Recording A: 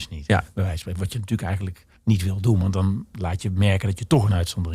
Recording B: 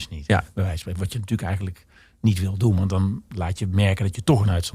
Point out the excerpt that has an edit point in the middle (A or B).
A